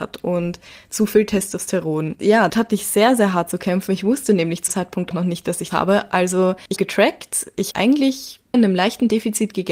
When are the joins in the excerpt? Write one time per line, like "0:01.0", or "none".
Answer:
0:02.5
0:04.7
0:05.1
0:05.7
0:06.8
0:07.7
0:08.5